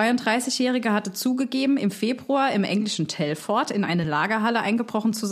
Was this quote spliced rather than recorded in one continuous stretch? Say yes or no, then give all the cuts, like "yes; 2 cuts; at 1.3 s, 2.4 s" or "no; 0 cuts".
no; 0 cuts